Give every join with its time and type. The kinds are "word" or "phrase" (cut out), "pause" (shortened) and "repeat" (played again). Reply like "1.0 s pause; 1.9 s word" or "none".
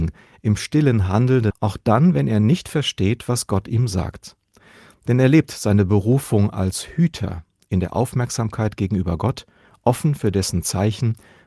1.5 s word